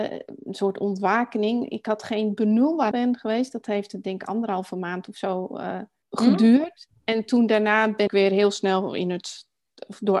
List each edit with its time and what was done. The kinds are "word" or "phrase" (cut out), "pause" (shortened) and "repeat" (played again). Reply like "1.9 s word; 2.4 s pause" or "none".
2.9 s phrase; 6.0 s pause; 8.1 s word